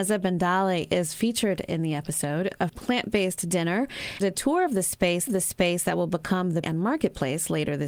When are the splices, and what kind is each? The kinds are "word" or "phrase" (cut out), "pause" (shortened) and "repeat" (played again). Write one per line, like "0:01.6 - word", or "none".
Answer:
0:02.7 - word
0:04.2 - word
0:05.3 - repeat
0:06.6 - phrase

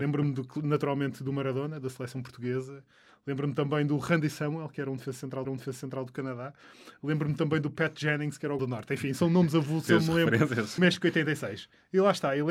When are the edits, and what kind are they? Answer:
0:05.4 - repeat
0:08.6 - phrase
0:09.9 - word
0:10.8 - word

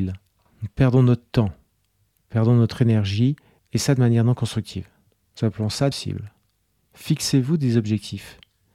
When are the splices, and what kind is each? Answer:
0:05.9 - phrase

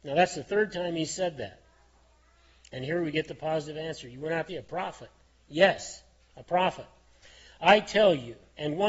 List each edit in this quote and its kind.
0:04.5 - word

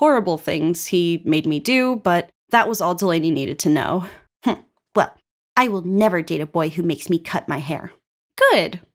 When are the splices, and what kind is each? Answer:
none

